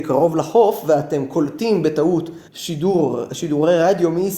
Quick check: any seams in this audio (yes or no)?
yes